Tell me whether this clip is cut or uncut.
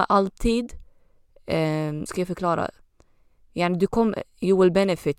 cut